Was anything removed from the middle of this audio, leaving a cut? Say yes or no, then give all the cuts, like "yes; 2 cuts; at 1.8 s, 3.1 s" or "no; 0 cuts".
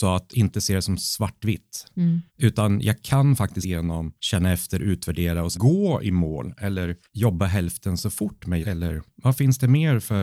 yes; 7 cuts; at 2.3 s, 3.6 s, 4.2 s, 5.5 s, 7.1 s, 8.6 s, 9.1 s